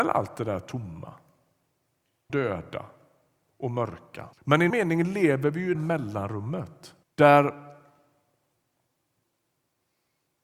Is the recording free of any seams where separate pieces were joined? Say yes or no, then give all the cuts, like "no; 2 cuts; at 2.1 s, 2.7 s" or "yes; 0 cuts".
no; 5 cuts; at 2.3 s, 4.3 s, 4.7 s, 5.7 s, 7.0 s